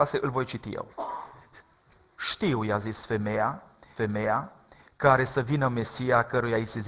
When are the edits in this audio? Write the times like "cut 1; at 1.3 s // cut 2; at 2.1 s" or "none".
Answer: cut 1; at 0.9 s // cut 2; at 4.0 s